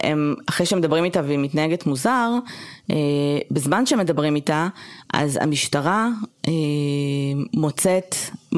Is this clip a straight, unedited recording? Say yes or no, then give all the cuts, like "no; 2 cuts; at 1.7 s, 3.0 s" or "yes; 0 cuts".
no; 1 cut; at 6.3 s